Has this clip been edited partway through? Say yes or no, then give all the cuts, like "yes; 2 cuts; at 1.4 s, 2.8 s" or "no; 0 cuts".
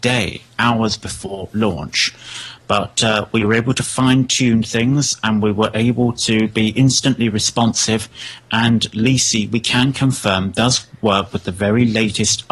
no; 0 cuts